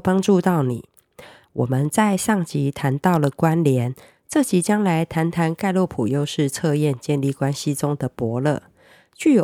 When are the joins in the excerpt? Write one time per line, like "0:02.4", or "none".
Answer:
none